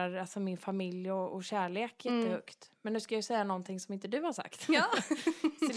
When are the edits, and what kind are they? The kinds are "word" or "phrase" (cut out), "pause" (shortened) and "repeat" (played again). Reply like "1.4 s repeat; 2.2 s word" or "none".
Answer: none